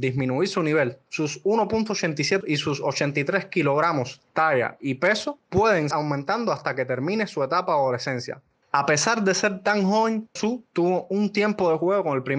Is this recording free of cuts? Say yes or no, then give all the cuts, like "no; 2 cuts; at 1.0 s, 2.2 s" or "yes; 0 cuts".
no; 3 cuts; at 2.4 s, 5.9 s, 10.4 s